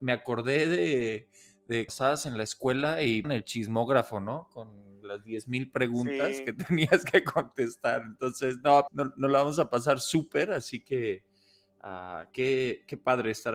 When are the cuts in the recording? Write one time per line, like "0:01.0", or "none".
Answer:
0:01.9
0:03.2
0:08.9
0:12.3

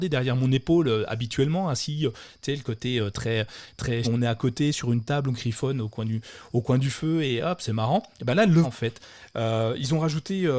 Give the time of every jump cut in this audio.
0:04.0
0:08.6

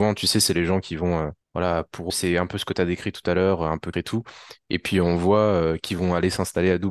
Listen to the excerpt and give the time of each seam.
0:01.4
0:02.1
0:03.9

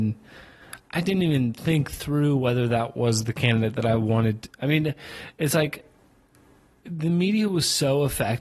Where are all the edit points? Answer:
none

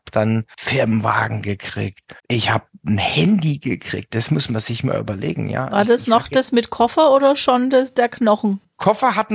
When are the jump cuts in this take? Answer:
0:02.2

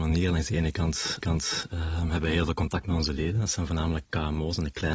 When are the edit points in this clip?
0:01.2

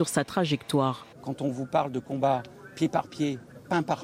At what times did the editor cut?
0:01.1

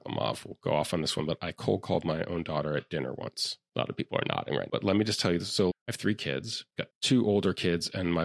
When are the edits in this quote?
0:04.7
0:05.7
0:06.9

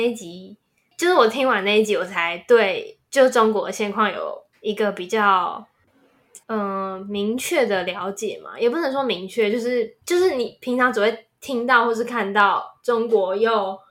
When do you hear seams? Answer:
0:03.1
0:04.5
0:06.4
0:10.0

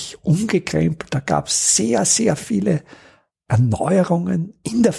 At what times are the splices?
none

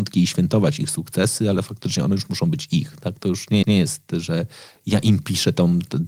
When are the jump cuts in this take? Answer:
0:03.6

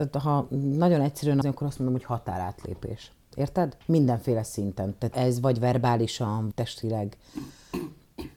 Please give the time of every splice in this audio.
0:01.4
0:03.8
0:05.1
0:06.5

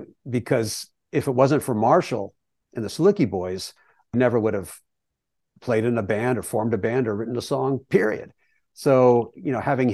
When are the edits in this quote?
0:04.1

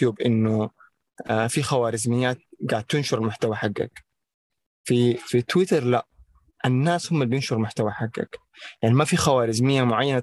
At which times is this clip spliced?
none

